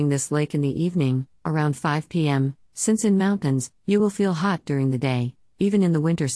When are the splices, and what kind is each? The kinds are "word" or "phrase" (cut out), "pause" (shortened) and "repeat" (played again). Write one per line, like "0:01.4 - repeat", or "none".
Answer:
none